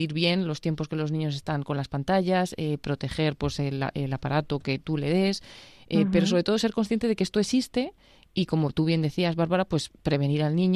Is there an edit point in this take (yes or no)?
no